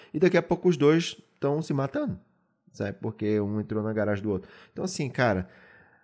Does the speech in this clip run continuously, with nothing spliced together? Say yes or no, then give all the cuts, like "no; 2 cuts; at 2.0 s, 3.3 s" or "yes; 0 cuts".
yes; 0 cuts